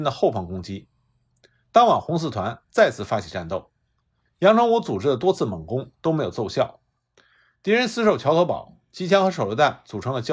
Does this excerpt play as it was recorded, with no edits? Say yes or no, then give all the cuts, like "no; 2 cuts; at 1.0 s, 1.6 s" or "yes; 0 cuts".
yes; 0 cuts